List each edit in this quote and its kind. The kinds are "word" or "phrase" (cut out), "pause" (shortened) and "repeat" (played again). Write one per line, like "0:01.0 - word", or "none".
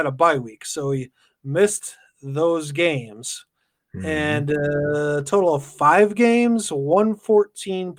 none